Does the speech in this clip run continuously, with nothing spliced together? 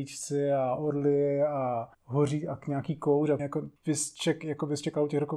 no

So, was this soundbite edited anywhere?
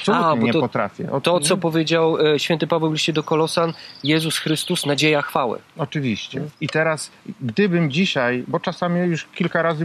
yes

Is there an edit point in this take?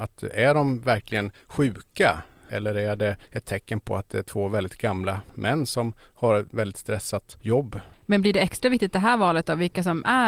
yes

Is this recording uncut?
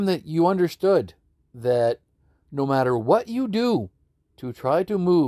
yes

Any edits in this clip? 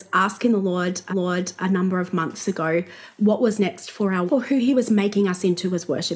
yes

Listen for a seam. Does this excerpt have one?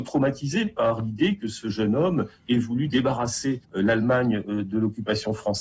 yes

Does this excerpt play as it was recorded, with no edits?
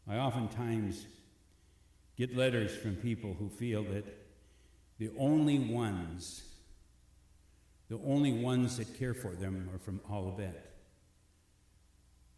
yes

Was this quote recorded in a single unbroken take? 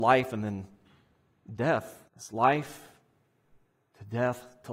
no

